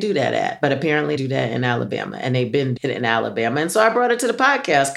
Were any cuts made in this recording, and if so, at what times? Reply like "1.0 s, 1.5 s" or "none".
1.2 s, 2.8 s